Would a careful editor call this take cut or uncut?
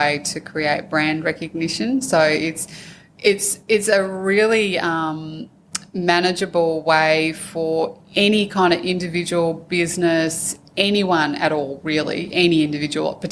uncut